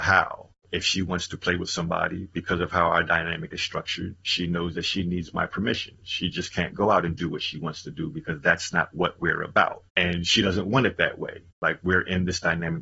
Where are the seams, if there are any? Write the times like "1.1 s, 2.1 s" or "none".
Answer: 9.9 s, 11.5 s